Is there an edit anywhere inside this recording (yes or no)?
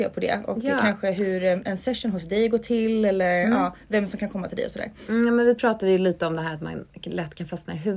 no